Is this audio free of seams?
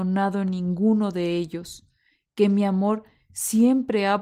yes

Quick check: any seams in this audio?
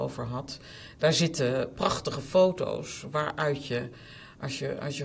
no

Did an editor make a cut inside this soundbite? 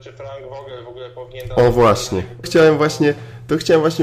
yes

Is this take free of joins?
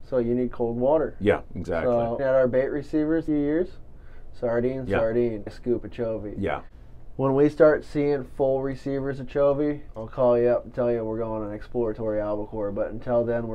no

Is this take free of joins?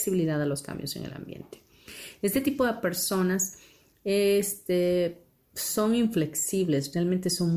yes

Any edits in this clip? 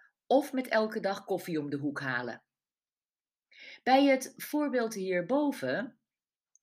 no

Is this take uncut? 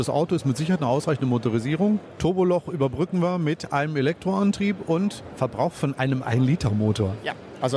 yes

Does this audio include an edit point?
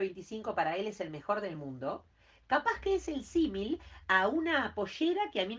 no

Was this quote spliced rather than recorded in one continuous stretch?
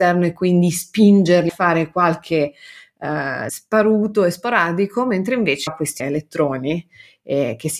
yes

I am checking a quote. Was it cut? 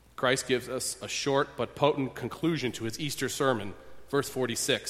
no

